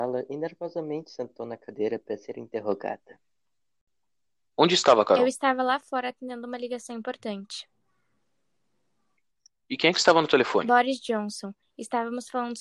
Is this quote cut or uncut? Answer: uncut